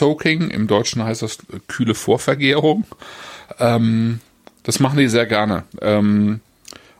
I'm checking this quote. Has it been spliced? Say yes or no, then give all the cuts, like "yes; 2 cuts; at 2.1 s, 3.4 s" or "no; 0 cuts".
no; 0 cuts